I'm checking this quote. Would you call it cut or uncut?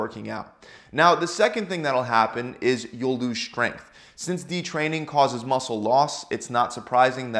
uncut